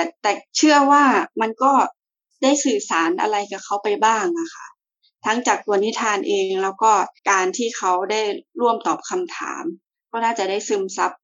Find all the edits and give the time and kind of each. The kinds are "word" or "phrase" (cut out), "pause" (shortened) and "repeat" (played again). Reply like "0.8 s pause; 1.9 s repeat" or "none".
7.2 s pause